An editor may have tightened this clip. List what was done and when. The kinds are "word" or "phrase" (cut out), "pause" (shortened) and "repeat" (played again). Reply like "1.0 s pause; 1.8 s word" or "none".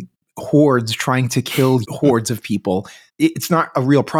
1.8 s word; 3.1 s word